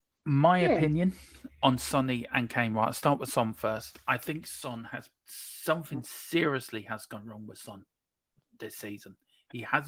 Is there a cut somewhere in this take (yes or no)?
no